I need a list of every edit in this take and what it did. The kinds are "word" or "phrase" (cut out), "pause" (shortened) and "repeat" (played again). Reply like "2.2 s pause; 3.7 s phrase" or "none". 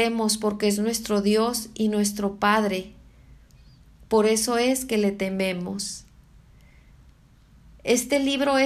none